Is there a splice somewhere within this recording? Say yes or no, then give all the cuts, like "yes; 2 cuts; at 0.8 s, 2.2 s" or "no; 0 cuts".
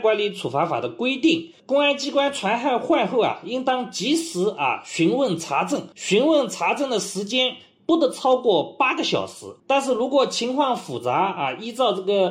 yes; 2 cuts; at 5.9 s, 9.6 s